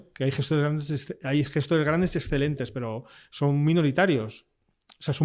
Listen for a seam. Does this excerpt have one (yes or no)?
no